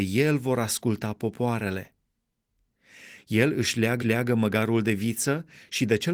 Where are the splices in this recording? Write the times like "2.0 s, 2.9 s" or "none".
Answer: 4.0 s